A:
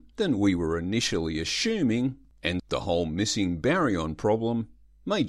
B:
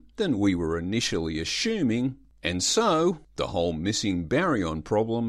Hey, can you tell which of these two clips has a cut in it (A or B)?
A